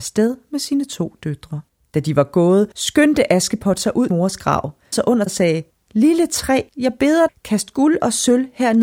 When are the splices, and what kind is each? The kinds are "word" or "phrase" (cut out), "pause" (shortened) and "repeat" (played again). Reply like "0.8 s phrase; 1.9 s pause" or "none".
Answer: 1.7 s pause; 2.7 s pause; 4.1 s phrase; 4.9 s word; 5.3 s word; 5.7 s pause; 6.7 s pause; 7.3 s word